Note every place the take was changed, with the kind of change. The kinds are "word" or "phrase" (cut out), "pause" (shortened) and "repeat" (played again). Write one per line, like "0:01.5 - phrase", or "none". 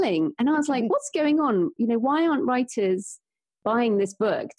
none